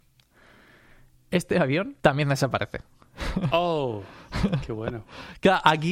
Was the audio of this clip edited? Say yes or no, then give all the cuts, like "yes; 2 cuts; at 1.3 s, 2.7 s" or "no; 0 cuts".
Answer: yes; 1 cut; at 2.0 s